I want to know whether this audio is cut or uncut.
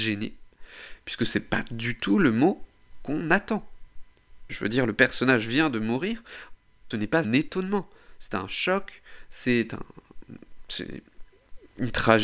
cut